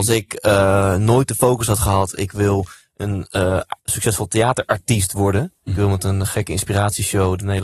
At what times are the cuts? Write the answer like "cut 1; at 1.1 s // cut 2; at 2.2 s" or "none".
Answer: cut 1; at 3.8 s